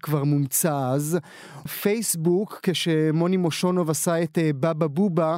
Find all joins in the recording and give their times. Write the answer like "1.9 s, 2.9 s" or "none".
1.7 s